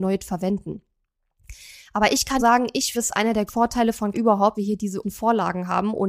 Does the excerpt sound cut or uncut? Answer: cut